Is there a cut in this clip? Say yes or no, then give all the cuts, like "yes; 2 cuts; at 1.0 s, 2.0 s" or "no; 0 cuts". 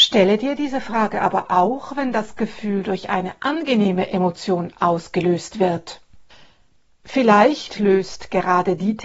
no; 0 cuts